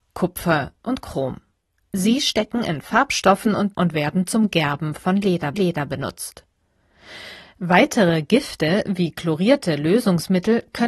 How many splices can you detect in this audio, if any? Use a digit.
2